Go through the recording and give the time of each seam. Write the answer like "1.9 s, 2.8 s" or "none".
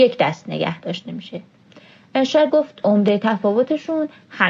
2.5 s